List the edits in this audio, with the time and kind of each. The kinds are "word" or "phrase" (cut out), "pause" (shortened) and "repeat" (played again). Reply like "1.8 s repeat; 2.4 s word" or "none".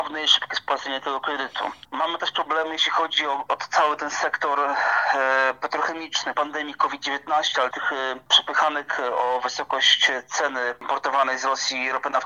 3.5 s word; 6.3 s phrase; 7.7 s word